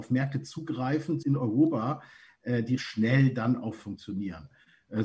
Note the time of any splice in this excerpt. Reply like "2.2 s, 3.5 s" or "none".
1.2 s, 2.8 s, 3.8 s